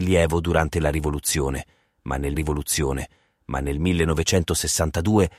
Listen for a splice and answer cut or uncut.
cut